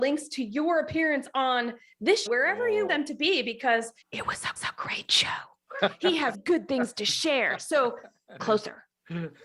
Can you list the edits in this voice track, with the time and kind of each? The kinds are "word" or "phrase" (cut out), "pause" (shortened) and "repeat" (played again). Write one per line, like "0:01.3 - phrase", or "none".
0:02.3 - word
0:02.9 - word
0:04.0 - pause
0:04.6 - repeat
0:06.3 - word
0:08.4 - word